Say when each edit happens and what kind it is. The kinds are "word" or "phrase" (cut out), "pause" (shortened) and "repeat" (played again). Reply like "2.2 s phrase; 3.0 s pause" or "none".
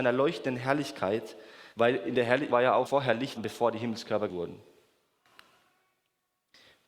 1.7 s pause; 2.5 s phrase; 2.9 s word; 3.4 s word; 4.3 s word